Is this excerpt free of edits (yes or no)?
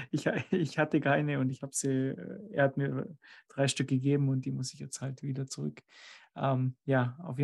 yes